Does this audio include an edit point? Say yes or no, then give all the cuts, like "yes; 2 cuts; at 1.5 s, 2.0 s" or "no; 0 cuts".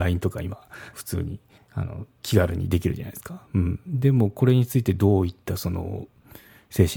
yes; 3 cuts; at 0.9 s, 1.6 s, 2.1 s